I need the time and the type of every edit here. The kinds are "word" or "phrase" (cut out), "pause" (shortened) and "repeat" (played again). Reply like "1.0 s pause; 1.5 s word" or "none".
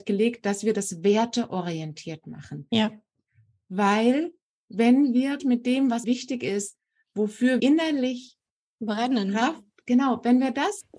5.4 s word; 6.0 s word; 7.6 s word; 9.8 s word